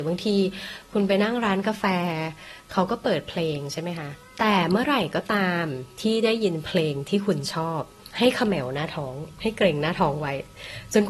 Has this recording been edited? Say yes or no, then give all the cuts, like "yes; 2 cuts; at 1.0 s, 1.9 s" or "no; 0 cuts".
yes; 1 cut; at 8.1 s